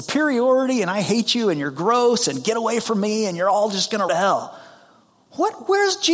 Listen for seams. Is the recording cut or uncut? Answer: cut